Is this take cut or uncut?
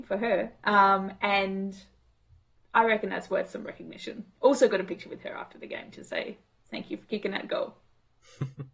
uncut